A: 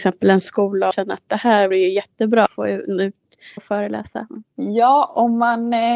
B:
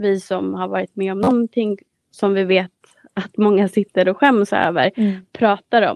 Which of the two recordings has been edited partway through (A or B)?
A